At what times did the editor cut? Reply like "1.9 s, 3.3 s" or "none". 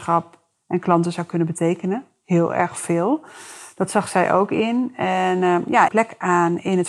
5.9 s